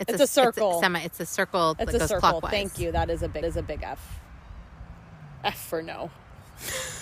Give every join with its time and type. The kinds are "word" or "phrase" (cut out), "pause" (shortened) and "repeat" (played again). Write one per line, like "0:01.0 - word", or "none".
0:03.4 - repeat